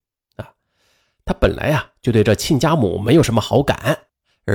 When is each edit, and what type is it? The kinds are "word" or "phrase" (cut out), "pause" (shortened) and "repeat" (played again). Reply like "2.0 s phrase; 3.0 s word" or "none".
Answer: none